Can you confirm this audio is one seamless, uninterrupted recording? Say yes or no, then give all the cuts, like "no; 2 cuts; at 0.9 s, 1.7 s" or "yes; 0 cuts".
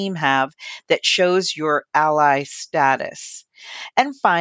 yes; 0 cuts